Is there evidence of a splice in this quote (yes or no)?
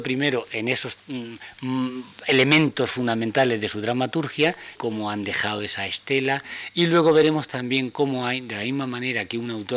yes